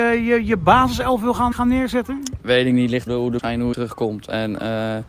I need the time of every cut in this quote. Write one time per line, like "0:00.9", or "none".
0:01.5
0:03.1
0:03.4
0:03.7